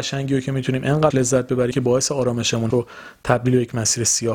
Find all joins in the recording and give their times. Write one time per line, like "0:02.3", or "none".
0:01.1
0:01.7
0:02.7